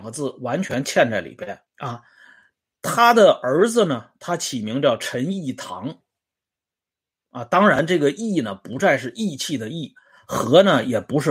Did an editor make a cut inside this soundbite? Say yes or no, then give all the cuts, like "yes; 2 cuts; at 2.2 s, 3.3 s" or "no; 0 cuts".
yes; 1 cut; at 1.7 s